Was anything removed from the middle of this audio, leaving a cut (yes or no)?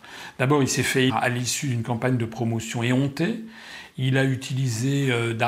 yes